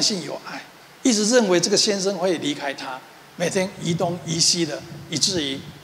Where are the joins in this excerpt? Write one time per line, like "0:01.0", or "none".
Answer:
none